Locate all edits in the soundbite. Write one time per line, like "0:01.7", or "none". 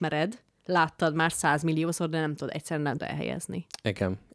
0:03.0